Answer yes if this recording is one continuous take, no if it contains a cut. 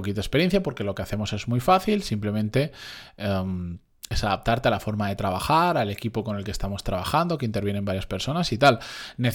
yes